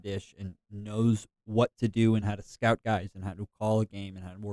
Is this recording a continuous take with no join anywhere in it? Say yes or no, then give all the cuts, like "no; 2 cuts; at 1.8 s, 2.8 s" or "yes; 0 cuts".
yes; 0 cuts